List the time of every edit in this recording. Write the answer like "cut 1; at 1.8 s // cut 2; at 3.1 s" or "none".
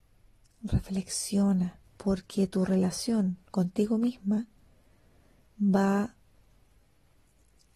cut 1; at 1.9 s // cut 2; at 3.5 s